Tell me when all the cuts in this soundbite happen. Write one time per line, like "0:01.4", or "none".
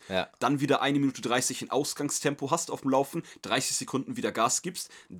none